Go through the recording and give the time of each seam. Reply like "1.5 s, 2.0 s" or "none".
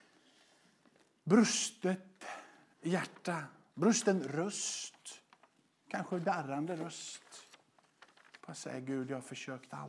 none